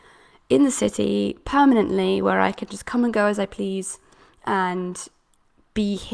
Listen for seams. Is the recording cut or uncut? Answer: uncut